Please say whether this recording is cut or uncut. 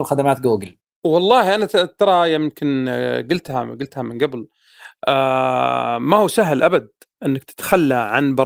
uncut